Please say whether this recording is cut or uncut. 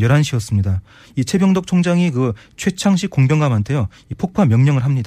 uncut